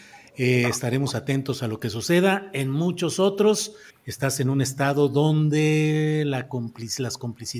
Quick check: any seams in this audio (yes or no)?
yes